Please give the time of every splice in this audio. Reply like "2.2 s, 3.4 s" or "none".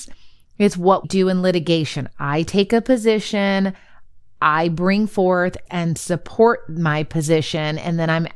1.0 s, 5.7 s